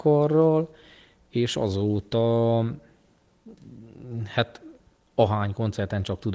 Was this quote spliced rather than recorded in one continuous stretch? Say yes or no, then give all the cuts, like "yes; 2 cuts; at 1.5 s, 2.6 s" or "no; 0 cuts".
no; 0 cuts